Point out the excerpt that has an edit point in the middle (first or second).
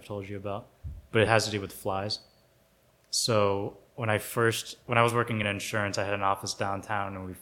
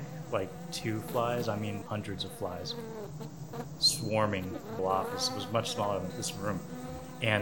second